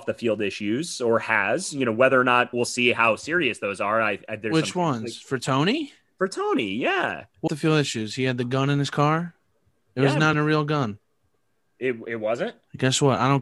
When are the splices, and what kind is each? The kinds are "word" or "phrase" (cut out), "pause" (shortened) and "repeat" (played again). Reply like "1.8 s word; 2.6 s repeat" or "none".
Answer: 2.5 s word; 7.5 s word; 10.3 s word